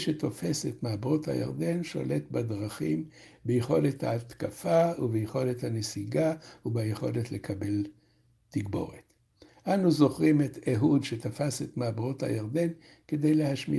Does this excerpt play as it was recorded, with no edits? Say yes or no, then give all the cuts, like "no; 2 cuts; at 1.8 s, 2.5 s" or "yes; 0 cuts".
yes; 0 cuts